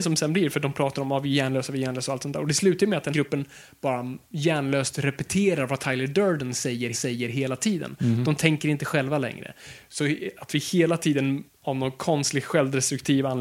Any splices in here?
yes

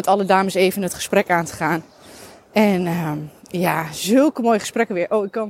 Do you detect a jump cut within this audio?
no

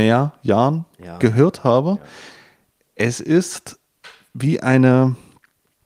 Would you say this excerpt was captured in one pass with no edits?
yes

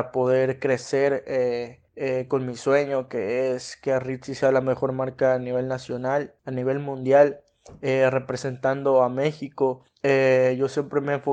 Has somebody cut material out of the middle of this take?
yes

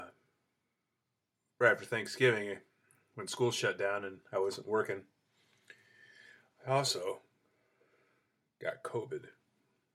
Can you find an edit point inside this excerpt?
no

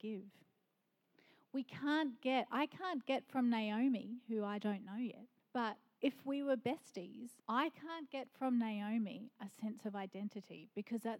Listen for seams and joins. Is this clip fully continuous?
no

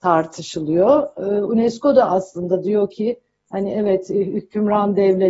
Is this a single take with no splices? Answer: yes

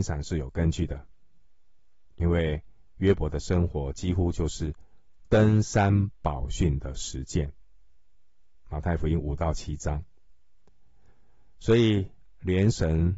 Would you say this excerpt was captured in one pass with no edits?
yes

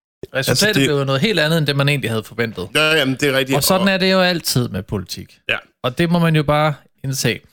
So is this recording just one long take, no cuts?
yes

